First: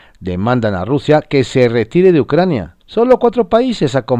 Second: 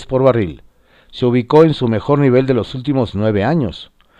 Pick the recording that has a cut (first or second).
first